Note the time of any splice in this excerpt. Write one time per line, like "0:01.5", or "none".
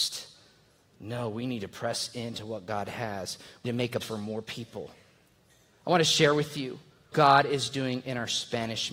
0:03.7
0:04.0
0:07.1